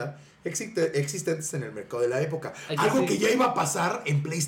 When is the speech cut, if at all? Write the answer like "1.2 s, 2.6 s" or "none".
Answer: none